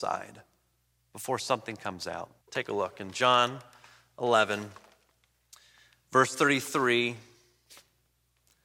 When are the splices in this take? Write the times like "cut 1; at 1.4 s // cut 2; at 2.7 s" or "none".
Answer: cut 1; at 2.4 s